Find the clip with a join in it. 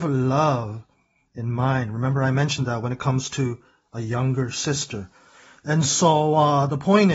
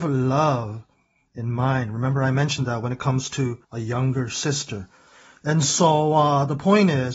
second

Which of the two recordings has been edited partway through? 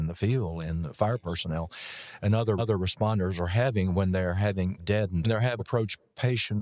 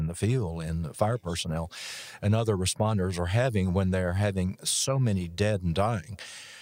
first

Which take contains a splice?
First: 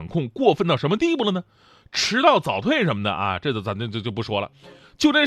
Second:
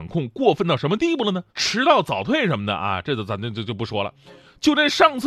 second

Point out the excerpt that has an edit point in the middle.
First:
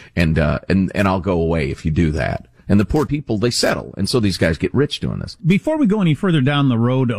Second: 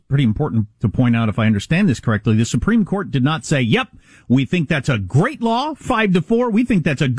first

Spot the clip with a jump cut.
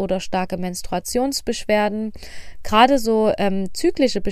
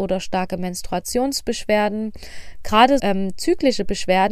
second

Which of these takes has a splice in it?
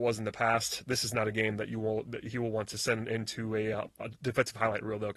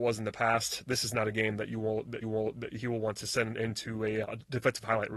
second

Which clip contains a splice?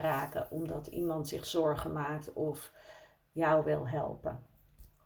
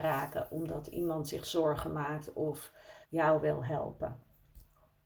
second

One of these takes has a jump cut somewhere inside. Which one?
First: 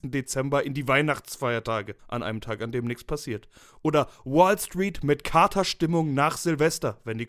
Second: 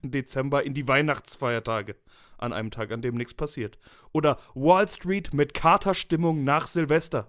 first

